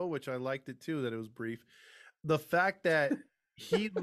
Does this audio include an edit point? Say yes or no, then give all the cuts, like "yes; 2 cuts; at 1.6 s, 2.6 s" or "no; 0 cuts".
no; 0 cuts